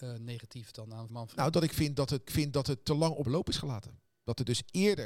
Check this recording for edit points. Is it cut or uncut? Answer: cut